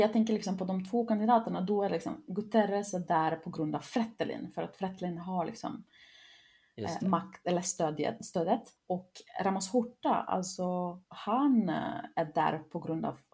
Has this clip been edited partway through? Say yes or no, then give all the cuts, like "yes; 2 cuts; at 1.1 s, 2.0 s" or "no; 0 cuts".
yes; 2 cuts; at 8.8 s, 11.0 s